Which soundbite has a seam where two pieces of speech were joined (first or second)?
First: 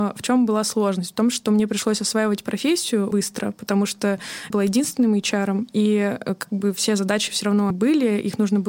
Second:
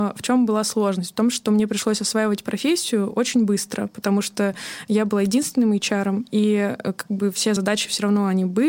first